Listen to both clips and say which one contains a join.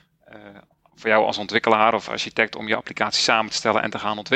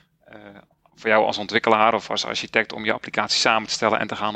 first; 1 cut; at 2.1 s

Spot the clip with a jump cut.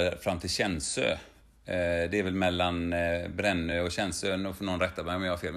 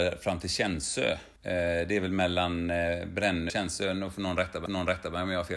second; 3 cuts; at 1.4 s, 3.5 s, 4.7 s

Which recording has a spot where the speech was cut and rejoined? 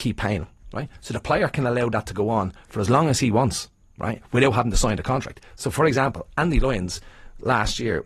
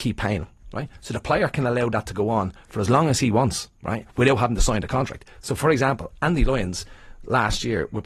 second; 1 cut; at 3.8 s

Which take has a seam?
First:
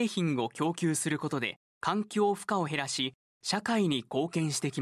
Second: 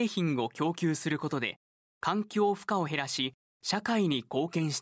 first; 1 cut; at 1.7 s

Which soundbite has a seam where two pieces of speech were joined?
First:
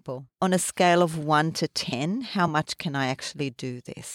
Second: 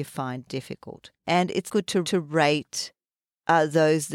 second; 3 cuts; at 1.2 s, 1.7 s, 2.0 s

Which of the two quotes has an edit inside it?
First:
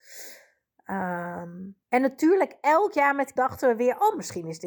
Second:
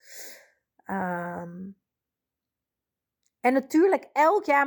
first; 2 cuts; at 1.8 s, 3.4 s

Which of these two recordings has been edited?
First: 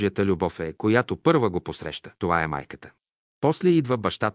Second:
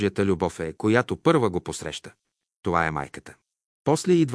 first; 1 cut; at 2.2 s

